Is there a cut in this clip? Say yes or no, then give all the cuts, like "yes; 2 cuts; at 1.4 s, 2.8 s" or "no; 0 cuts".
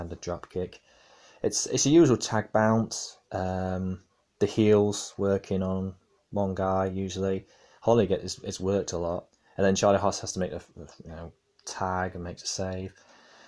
no; 0 cuts